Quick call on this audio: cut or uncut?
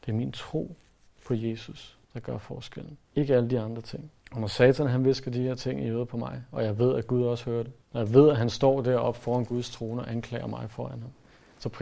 cut